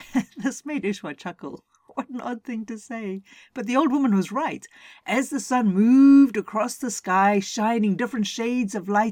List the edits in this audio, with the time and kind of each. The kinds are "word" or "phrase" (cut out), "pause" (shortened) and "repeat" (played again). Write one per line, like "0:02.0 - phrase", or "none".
none